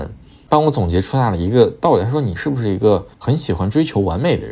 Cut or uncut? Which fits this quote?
cut